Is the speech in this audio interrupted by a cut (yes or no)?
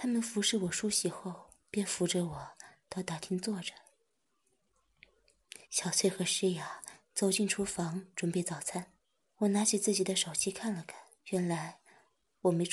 yes